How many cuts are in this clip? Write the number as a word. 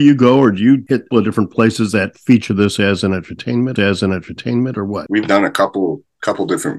three